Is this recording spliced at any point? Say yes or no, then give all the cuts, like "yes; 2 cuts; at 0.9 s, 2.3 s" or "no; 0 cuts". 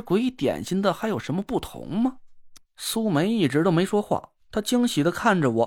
yes; 1 cut; at 2.6 s